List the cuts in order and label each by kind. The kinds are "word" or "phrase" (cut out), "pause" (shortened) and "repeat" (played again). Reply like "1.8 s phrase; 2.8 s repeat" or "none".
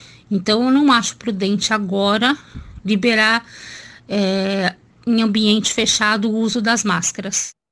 none